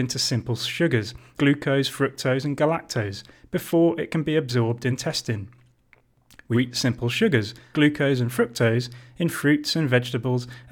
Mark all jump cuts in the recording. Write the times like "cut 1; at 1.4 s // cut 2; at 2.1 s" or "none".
cut 1; at 1.4 s // cut 2; at 4.9 s // cut 3; at 6.5 s // cut 4; at 7.7 s